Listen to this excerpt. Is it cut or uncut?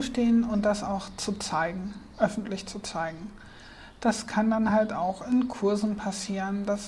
uncut